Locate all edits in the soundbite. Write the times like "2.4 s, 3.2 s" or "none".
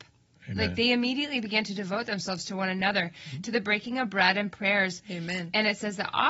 none